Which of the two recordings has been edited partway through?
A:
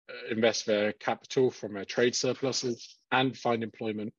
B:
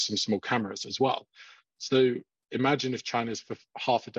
A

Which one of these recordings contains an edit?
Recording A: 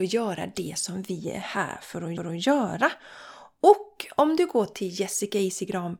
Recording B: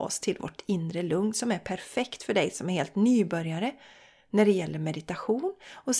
A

